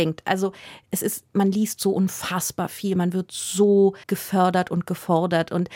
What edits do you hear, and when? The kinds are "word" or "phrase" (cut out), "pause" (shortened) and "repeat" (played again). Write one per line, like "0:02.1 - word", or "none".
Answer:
0:04.0 - pause